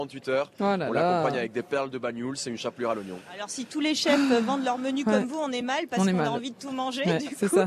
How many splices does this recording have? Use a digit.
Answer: 0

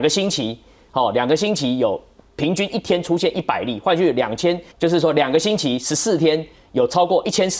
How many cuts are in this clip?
1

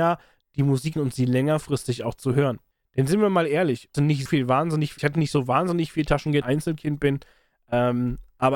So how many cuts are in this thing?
6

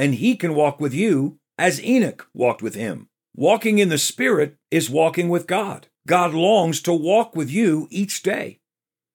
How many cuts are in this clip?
3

